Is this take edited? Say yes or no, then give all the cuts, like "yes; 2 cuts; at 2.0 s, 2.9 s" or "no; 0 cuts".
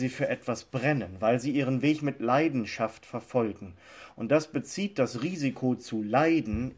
no; 0 cuts